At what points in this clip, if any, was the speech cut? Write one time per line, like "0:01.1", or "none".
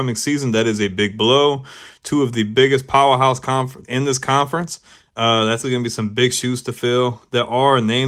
0:03.8
0:05.6